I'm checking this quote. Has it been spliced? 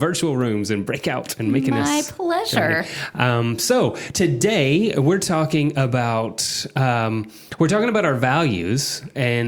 no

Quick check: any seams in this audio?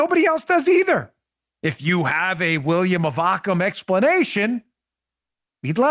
yes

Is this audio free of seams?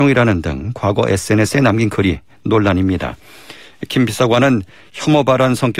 yes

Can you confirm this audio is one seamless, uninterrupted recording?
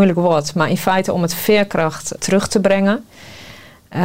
no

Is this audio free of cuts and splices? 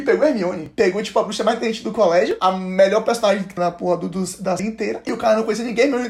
no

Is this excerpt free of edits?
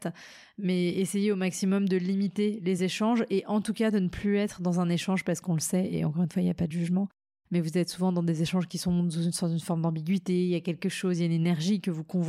yes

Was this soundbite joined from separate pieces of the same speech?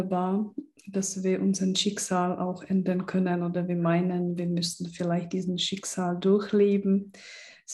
no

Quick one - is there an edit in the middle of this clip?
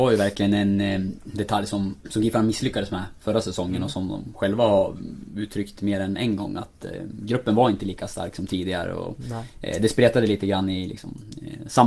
no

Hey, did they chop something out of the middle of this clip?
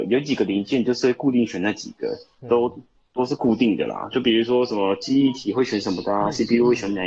no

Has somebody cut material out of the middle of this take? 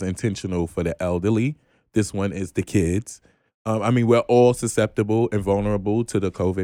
no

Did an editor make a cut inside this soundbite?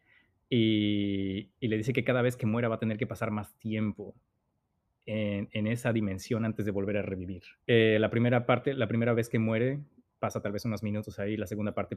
yes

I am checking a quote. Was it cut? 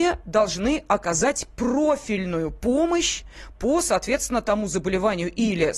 no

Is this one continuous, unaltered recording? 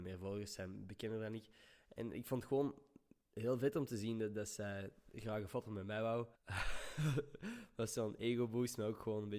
no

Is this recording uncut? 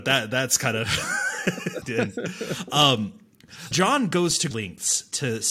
no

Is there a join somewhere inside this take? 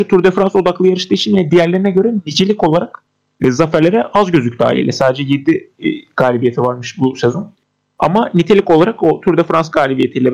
no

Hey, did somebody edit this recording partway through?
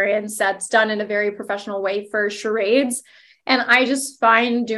no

